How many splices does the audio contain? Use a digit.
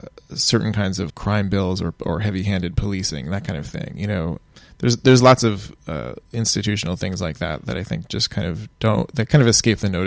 2